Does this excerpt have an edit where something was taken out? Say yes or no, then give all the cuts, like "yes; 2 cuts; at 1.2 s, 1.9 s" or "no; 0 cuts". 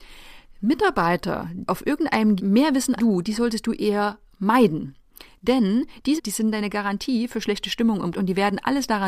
yes; 5 cuts; at 1.7 s, 2.4 s, 3.0 s, 6.2 s, 8.1 s